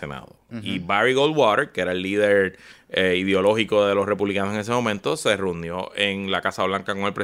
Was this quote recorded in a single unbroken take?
yes; 0 cuts

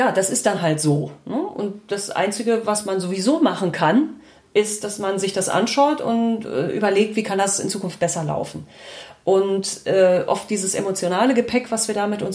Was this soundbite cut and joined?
no; 0 cuts

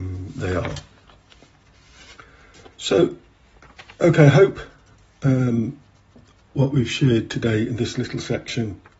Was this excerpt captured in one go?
no; 1 cut; at 2.7 s

